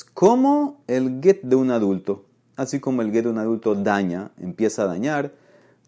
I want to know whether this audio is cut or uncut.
uncut